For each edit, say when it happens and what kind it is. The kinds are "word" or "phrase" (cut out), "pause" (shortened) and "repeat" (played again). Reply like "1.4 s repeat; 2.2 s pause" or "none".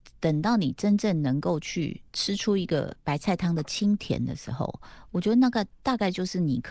2.1 s pause